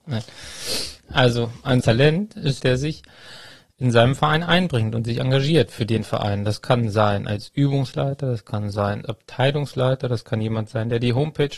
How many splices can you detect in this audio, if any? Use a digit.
3